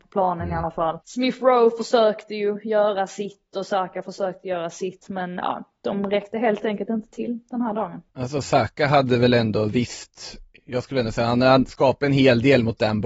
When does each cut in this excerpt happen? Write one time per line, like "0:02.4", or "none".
0:01.0
0:08.1